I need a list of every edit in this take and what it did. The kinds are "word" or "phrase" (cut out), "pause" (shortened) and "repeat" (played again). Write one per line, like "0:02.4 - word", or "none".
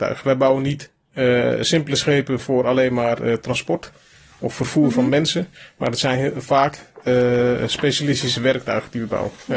none

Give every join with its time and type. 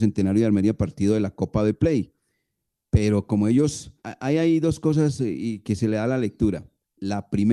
0:04.0 - pause

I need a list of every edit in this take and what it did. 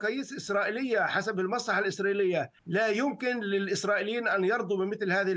0:02.6 - pause

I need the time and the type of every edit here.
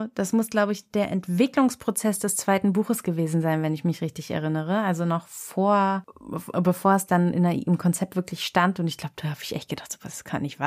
none

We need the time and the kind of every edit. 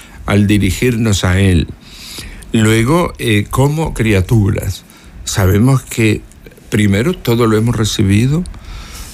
none

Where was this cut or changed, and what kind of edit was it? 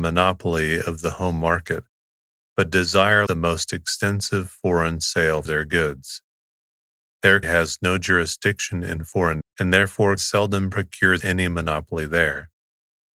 0:03.3 - word
0:05.5 - word
0:07.4 - word
0:09.4 - word
0:10.2 - word
0:11.2 - word

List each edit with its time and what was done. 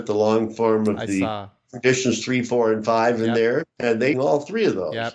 0:04.1 - phrase

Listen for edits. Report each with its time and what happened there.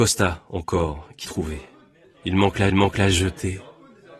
0:01.2 - word
0:02.0 - pause
0:02.7 - repeat

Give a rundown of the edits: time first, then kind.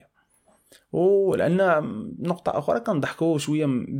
none

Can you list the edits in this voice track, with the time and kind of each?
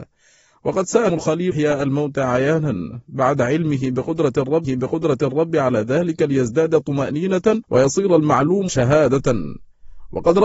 0:01.1 - word
0:01.5 - phrase
0:04.6 - repeat
0:07.6 - pause
0:08.7 - word

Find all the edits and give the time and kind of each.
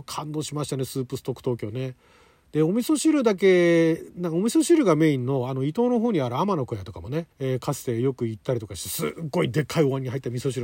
0:07.3 - pause

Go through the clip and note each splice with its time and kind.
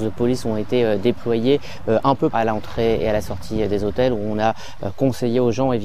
0:02.3 - phrase

